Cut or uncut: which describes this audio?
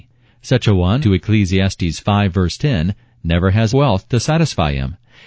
cut